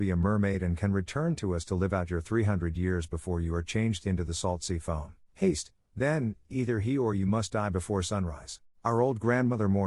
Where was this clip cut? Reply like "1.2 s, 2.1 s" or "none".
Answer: 5.2 s, 8.7 s